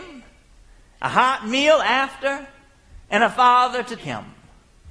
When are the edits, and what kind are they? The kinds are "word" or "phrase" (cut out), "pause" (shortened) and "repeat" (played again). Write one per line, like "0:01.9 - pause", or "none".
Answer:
0:03.0 - pause
0:04.0 - word